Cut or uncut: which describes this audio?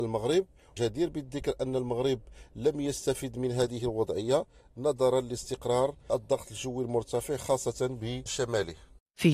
uncut